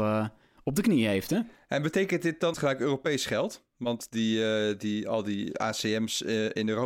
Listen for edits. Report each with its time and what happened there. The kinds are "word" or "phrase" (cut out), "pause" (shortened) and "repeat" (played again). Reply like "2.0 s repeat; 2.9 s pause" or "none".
2.5 s phrase